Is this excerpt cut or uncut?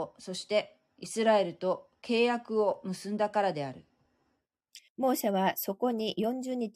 cut